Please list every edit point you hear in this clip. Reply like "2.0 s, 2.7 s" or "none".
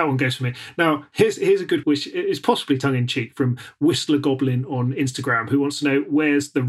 1.8 s